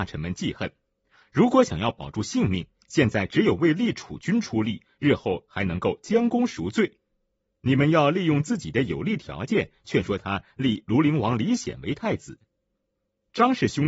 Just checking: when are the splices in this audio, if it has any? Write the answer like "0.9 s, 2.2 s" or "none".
none